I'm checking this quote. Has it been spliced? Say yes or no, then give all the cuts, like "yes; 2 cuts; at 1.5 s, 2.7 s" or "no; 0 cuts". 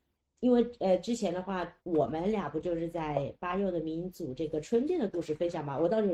yes; 1 cut; at 1.8 s